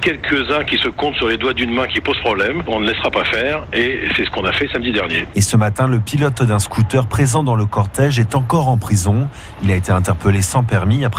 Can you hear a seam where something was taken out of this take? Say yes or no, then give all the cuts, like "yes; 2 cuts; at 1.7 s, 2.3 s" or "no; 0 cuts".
no; 0 cuts